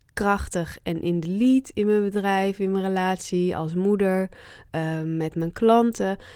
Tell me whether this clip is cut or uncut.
uncut